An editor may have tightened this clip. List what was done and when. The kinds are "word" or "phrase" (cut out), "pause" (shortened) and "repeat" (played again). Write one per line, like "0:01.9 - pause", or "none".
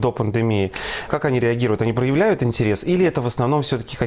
0:01.1 - word